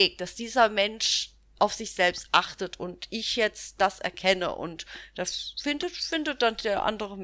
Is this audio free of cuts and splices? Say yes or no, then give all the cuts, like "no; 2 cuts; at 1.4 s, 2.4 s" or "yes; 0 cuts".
yes; 0 cuts